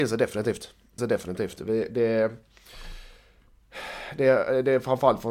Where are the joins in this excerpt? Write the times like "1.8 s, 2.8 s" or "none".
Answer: 1.0 s